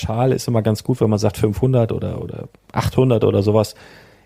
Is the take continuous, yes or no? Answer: yes